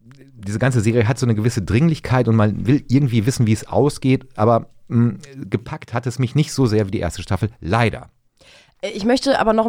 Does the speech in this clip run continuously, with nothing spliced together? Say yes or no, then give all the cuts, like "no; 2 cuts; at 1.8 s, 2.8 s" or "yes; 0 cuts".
yes; 0 cuts